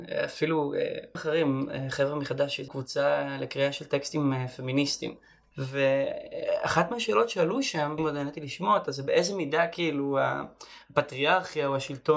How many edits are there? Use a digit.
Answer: 3